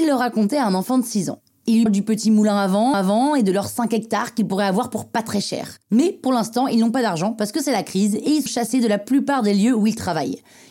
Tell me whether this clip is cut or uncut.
cut